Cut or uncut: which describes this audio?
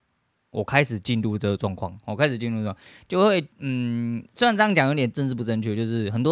cut